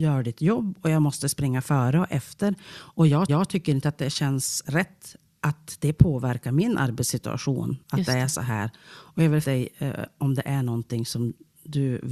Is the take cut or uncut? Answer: cut